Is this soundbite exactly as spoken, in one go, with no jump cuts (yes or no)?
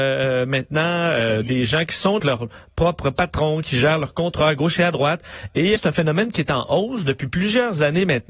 no